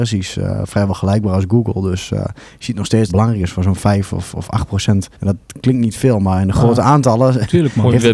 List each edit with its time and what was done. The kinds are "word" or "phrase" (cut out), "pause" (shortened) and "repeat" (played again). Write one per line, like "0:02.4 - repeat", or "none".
0:03.1 - phrase
0:05.1 - pause